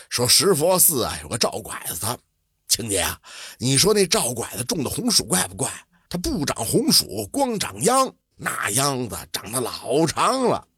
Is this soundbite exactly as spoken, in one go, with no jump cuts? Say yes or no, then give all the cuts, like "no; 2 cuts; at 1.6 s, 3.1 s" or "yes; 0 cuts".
no; 1 cut; at 8.3 s